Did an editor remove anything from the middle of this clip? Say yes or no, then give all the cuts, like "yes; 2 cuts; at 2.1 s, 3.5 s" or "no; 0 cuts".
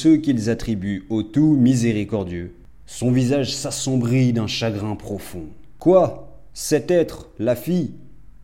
no; 0 cuts